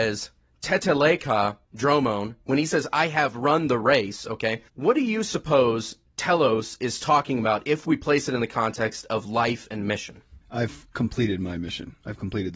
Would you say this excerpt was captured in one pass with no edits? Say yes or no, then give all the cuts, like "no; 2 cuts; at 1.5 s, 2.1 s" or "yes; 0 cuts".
no; 3 cuts; at 1.6 s, 4.7 s, 10.4 s